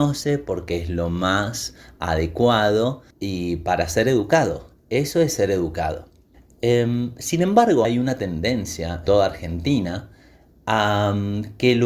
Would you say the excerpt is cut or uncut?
cut